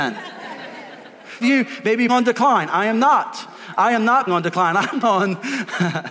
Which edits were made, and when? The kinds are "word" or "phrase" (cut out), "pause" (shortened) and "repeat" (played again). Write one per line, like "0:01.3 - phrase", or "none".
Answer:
0:01.4 - phrase
0:02.1 - word
0:04.3 - word
0:05.0 - word